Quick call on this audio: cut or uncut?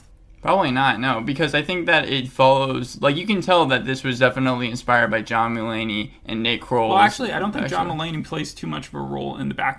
uncut